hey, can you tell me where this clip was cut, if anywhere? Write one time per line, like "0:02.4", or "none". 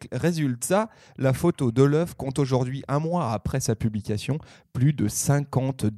none